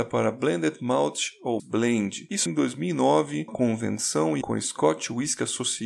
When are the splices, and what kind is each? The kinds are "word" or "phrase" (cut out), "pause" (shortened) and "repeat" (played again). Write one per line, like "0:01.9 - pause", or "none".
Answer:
0:01.6 - word
0:02.5 - word
0:03.5 - word
0:04.4 - word